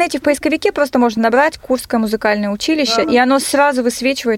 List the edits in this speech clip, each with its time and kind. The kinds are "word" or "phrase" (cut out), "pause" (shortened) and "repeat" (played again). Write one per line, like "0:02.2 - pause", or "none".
none